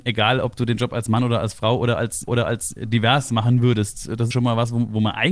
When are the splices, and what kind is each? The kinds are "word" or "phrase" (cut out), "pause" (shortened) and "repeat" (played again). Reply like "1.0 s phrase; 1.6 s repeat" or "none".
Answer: 2.3 s repeat; 4.3 s phrase